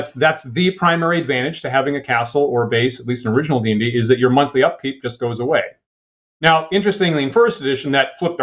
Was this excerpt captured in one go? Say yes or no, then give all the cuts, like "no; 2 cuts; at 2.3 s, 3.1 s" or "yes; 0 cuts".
yes; 0 cuts